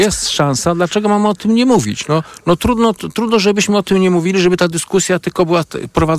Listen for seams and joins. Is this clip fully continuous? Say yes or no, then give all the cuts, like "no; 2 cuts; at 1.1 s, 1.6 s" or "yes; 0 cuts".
yes; 0 cuts